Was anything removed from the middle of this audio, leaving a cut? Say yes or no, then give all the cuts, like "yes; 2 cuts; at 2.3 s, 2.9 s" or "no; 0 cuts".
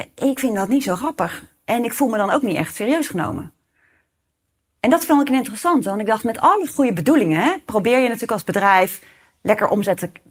no; 0 cuts